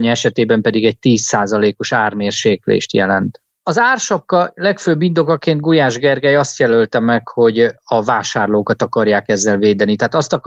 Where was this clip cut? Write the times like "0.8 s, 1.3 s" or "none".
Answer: none